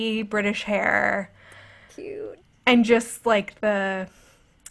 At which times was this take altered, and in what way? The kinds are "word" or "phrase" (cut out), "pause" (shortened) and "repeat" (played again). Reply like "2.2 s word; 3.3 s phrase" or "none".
none